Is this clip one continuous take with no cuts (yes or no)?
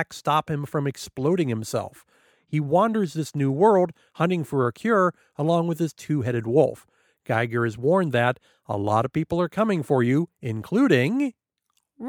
yes